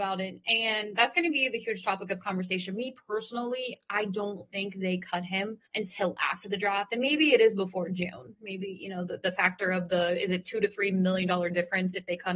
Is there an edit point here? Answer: yes; 1 cut; at 5.7 s

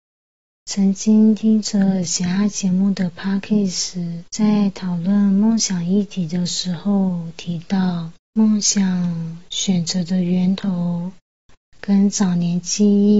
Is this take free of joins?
no; 2 cuts; at 4.3 s, 8.2 s

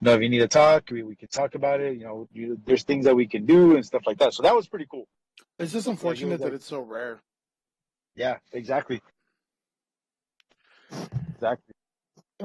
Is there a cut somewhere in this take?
no; 0 cuts

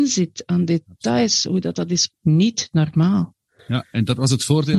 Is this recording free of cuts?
no; 1 cut; at 2.1 s

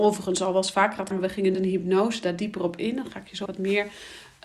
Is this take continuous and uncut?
no; 3 cuts; at 1.1 s, 1.5 s, 3.5 s

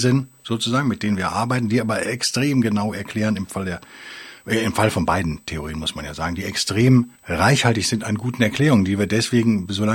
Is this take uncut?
no; 1 cut; at 7.2 s

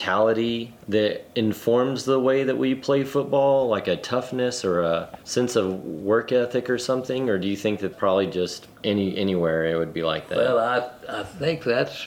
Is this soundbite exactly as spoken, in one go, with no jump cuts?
no; 2 cuts; at 5.2 s, 7.9 s

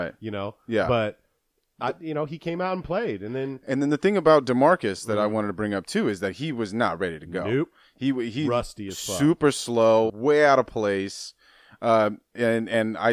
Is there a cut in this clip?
yes; 1 cut; at 10.1 s

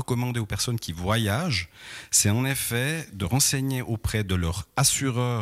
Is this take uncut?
no; 1 cut; at 3.2 s

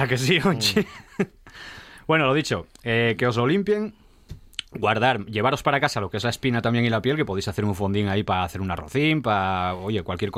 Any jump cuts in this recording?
no; 0 cuts

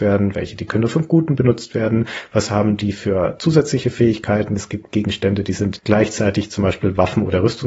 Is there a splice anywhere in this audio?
no; 0 cuts

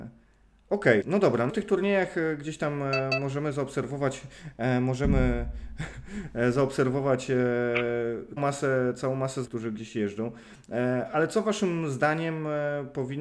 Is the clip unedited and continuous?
no; 4 cuts; at 1.0 s, 1.5 s, 8.4 s, 9.4 s

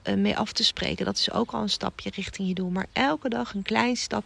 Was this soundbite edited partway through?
no; 0 cuts

